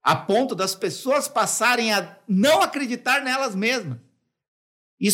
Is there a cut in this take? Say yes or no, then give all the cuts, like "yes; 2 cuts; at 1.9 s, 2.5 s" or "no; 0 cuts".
no; 0 cuts